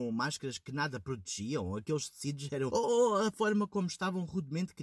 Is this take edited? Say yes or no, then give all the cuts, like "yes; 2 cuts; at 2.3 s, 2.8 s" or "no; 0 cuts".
yes; 1 cut; at 2.7 s